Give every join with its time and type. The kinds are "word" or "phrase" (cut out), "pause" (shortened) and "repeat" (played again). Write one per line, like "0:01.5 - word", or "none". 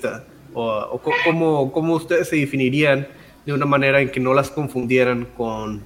none